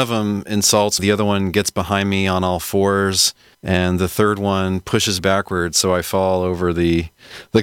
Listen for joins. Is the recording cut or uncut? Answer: cut